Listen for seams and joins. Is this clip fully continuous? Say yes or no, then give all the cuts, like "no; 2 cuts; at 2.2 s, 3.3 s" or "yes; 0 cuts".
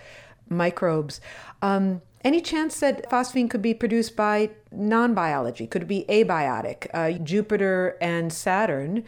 no; 2 cuts; at 3.1 s, 7.2 s